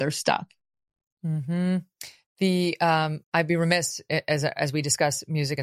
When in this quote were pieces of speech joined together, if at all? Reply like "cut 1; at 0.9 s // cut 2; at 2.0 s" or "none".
cut 1; at 3.2 s